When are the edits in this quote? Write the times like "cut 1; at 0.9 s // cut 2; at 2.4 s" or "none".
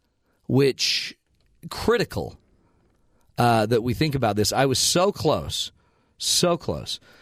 none